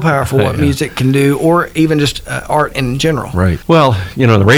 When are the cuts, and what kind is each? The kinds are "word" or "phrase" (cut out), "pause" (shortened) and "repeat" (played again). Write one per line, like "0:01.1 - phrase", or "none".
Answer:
none